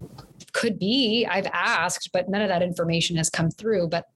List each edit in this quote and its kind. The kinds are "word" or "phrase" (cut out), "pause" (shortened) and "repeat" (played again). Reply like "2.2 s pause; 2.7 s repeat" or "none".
none